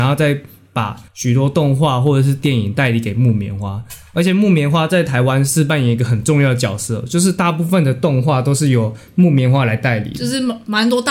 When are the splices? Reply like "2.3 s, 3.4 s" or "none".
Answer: 1.1 s